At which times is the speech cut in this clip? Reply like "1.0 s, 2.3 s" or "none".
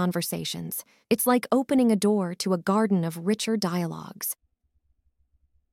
1.0 s